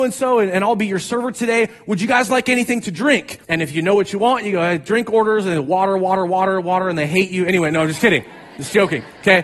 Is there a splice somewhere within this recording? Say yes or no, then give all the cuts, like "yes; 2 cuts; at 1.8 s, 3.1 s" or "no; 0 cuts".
yes; 1 cut; at 3.4 s